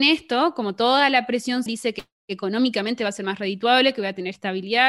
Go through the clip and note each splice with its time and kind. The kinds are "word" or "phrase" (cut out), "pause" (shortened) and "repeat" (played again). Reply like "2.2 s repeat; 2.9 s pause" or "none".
1.7 s word